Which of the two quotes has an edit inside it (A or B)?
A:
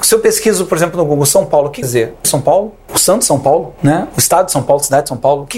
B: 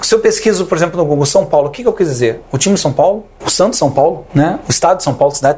A